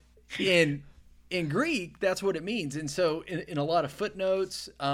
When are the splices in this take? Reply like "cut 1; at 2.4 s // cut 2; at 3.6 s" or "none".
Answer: none